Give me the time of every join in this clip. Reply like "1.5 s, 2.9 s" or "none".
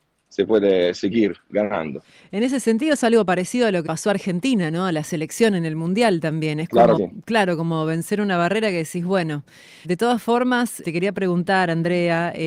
3.9 s, 7.0 s, 9.8 s, 10.8 s